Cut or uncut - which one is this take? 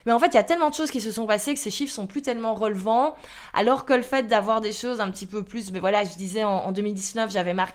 uncut